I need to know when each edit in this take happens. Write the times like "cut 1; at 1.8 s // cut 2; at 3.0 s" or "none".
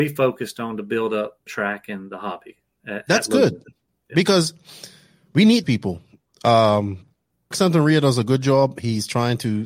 cut 1; at 1.5 s // cut 2; at 5.6 s // cut 3; at 7.5 s